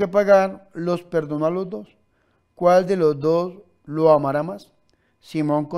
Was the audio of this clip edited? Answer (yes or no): no